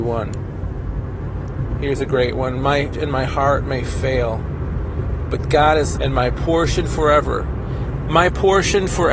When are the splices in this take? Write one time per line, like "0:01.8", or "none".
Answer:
0:02.9
0:06.0